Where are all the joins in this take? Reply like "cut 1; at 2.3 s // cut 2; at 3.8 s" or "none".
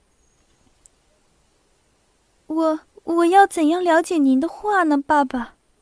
cut 1; at 2.9 s